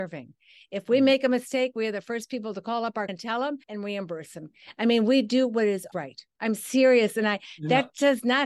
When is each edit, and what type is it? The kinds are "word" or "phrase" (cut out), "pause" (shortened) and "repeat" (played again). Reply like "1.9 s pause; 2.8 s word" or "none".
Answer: 3.1 s word; 3.6 s pause; 5.9 s word